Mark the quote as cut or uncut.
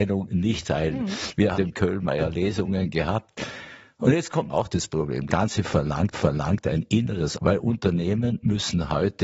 cut